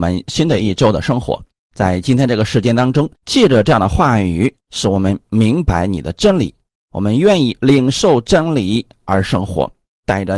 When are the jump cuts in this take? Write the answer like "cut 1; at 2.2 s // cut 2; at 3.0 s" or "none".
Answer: cut 1; at 1.5 s // cut 2; at 3.2 s // cut 3; at 4.6 s